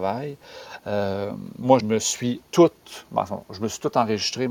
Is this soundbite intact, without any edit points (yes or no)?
no